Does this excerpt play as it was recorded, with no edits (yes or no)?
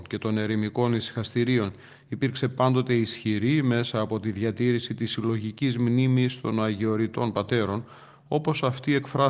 yes